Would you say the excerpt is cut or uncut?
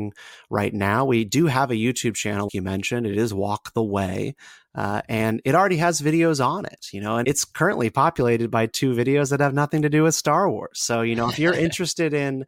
cut